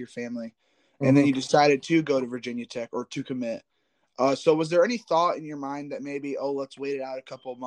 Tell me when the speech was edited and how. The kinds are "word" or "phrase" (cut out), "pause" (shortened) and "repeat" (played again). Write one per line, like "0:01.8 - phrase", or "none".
none